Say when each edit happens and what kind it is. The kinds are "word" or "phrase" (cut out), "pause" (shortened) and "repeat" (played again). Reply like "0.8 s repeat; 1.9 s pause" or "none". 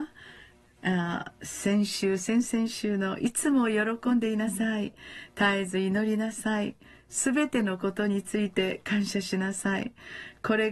none